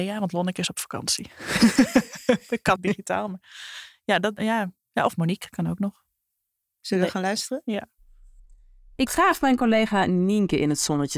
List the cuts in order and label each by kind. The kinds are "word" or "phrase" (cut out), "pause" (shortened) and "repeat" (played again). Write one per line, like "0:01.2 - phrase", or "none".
0:02.8 - word
0:04.4 - word
0:09.1 - word